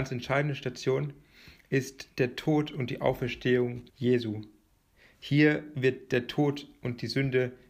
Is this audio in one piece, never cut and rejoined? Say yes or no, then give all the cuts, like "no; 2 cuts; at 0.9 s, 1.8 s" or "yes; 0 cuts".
no; 1 cut; at 3.9 s